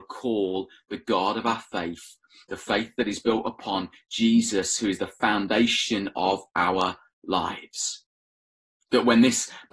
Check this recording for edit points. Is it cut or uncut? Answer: uncut